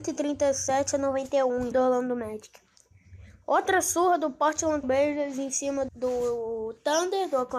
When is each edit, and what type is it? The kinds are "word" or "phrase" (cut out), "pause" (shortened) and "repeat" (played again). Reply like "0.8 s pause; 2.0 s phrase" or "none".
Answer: 1.7 s word; 4.8 s word; 5.9 s word